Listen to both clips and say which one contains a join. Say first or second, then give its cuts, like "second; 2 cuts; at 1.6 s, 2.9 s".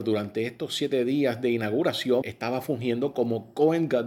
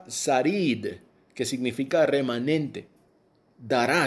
first; 1 cut; at 2.2 s